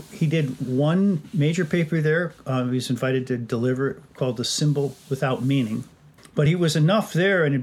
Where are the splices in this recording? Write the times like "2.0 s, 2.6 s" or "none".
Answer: none